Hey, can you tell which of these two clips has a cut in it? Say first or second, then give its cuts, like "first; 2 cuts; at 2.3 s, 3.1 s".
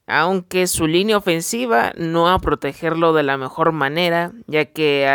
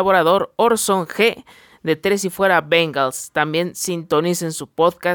first; 1 cut; at 2.4 s